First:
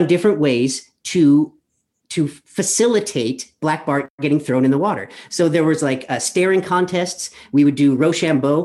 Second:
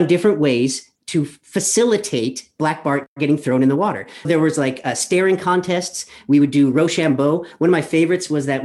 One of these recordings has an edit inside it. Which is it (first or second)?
second